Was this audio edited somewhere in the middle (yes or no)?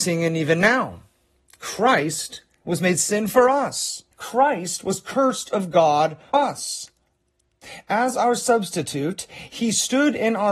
yes